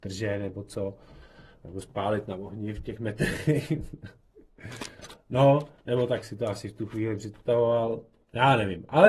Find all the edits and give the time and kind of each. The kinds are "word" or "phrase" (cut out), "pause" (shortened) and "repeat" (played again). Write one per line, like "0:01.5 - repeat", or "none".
0:06.2 - word